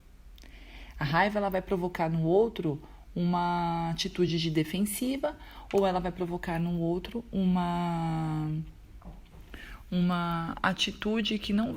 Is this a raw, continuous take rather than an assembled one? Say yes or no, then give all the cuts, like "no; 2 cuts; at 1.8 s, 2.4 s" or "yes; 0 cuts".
yes; 0 cuts